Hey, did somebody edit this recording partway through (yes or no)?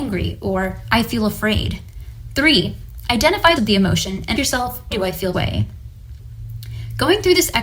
yes